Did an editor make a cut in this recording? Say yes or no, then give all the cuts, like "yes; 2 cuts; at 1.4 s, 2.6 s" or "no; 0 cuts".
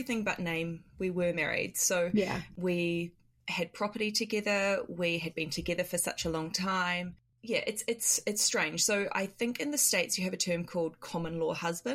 no; 0 cuts